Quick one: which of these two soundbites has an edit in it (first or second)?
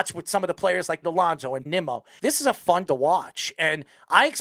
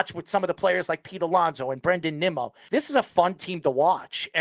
first